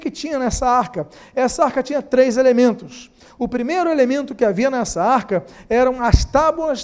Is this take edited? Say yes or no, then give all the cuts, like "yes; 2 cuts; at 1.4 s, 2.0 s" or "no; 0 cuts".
no; 0 cuts